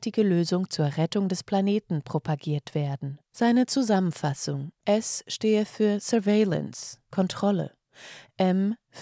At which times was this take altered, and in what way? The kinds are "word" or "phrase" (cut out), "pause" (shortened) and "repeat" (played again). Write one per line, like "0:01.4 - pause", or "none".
0:03.2 - pause
0:04.8 - pause